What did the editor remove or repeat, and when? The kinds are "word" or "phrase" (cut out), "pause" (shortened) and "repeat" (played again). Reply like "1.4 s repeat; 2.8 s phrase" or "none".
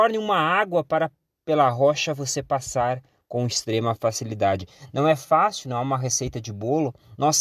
none